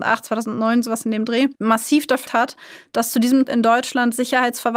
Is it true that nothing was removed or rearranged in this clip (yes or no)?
no